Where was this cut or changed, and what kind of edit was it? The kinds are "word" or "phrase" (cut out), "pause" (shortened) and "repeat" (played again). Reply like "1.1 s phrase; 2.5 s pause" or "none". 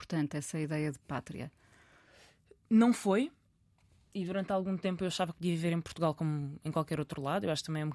none